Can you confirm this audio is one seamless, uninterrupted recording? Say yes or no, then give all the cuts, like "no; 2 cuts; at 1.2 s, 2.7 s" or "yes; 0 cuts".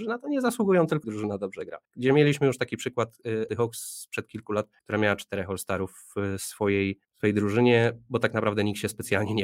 no; 5 cuts; at 1.0 s, 1.8 s, 3.5 s, 4.8 s, 7.0 s